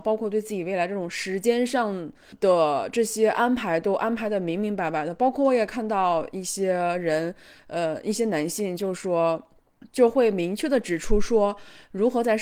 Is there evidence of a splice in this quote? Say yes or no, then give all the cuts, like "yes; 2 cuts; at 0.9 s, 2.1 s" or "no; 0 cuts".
no; 0 cuts